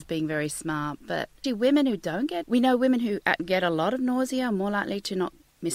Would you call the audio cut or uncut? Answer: cut